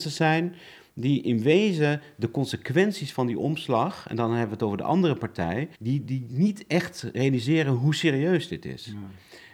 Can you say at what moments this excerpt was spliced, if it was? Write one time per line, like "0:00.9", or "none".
0:05.7